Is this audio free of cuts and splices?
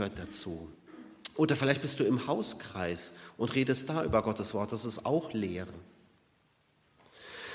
yes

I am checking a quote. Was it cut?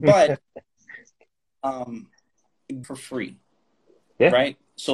yes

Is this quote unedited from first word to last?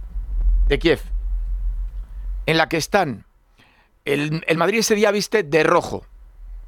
yes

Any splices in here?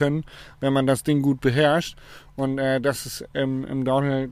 no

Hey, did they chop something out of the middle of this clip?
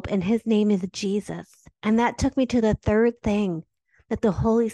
yes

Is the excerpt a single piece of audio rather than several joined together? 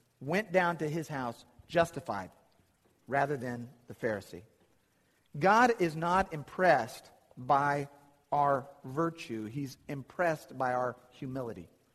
yes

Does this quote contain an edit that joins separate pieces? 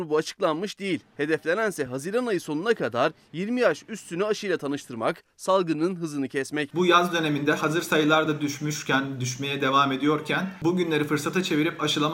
no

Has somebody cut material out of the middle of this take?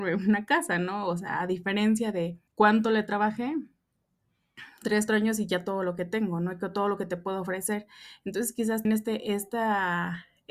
yes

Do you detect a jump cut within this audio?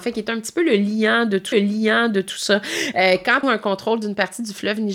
yes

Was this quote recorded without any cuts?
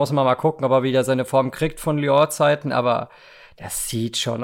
yes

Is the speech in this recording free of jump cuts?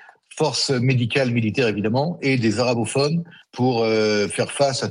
yes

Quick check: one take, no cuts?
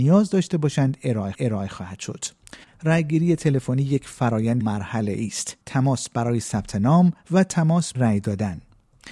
no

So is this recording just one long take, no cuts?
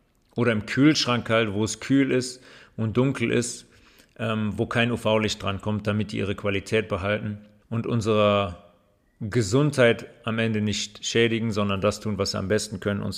no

